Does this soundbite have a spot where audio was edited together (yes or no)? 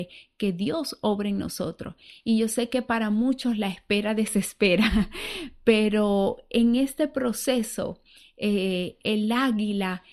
no